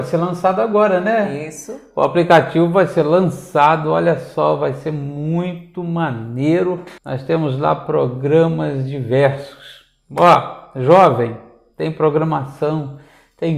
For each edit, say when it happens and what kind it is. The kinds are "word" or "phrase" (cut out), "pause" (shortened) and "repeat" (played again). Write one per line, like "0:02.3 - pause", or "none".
0:07.0 - pause

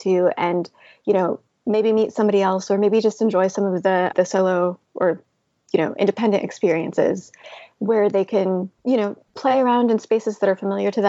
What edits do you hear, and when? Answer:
0:04.1 - word
0:04.8 - pause
0:08.8 - pause
0:09.3 - pause

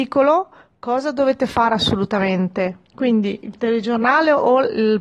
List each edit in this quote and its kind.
0:02.9 - pause

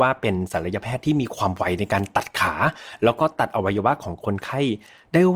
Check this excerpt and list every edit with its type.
none

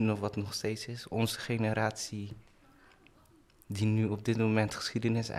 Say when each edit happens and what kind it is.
none

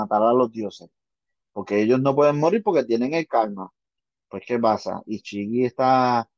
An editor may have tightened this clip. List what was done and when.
none

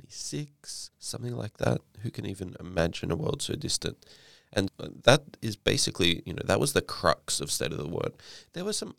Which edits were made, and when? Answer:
0:00.9 - pause
0:04.7 - word

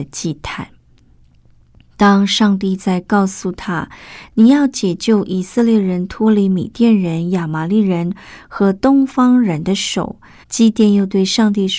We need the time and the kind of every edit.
0:10.4 - pause

